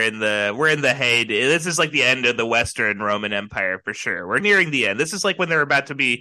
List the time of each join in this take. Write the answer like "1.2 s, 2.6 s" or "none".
4.4 s

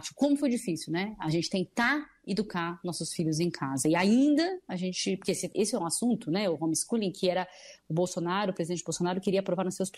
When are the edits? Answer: none

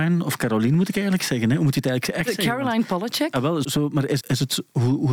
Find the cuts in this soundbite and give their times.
3.6 s, 4.2 s

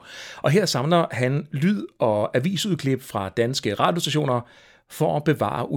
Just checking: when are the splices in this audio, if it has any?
none

